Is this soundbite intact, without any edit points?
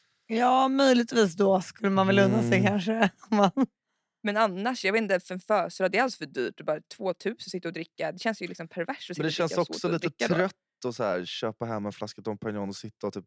yes; 0 cuts

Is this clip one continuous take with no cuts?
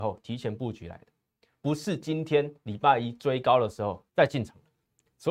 no; 1 cut; at 4.1 s

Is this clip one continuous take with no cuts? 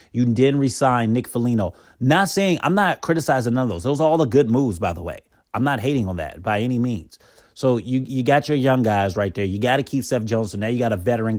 yes; 0 cuts

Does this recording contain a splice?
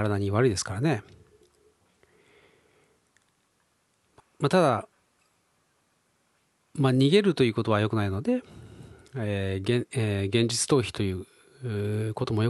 yes; 1 cut; at 4.2 s

